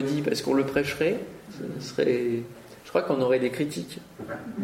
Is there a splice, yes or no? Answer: no